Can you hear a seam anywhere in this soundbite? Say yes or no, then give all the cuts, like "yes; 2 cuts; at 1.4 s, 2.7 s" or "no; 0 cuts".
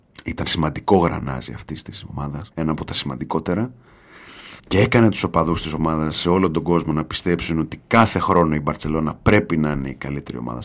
yes; 2 cuts; at 2.5 s, 4.6 s